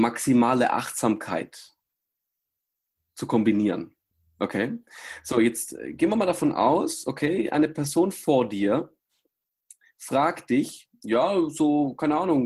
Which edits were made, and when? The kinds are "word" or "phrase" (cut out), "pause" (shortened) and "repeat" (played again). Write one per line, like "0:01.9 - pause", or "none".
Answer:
none